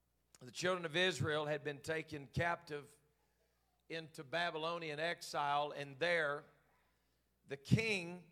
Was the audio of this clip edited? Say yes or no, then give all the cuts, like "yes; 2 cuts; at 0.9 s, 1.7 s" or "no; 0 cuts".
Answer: no; 0 cuts